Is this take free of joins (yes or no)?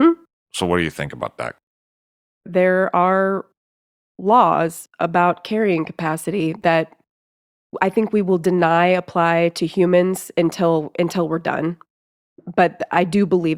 yes